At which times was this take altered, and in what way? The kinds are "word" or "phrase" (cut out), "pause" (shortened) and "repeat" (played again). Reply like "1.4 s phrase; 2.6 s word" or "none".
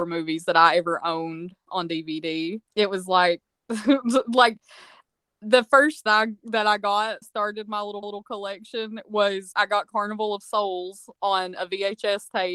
2.7 s pause; 3.4 s word; 6.1 s phrase; 7.2 s phrase; 8.0 s repeat; 9.5 s word